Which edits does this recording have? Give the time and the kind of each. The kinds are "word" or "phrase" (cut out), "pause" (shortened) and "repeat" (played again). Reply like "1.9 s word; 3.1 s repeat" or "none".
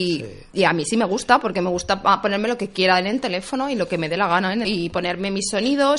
4.6 s phrase